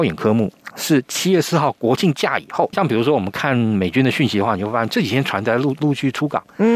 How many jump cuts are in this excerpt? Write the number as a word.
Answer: one